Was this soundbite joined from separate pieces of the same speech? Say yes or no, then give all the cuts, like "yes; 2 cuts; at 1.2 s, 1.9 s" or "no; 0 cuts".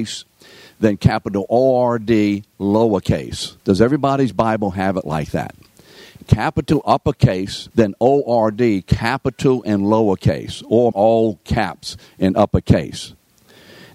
yes; 4 cuts; at 3.6 s, 6.8 s, 7.7 s, 10.9 s